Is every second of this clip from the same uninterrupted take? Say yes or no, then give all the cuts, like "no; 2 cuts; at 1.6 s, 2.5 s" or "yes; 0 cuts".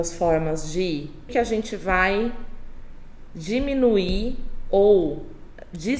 no; 1 cut; at 1.3 s